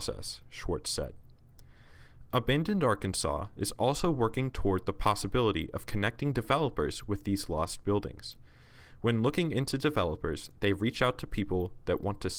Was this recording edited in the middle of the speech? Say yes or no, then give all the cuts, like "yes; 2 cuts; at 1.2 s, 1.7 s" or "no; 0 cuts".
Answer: no; 0 cuts